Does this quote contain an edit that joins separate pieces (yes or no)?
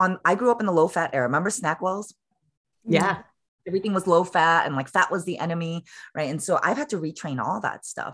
no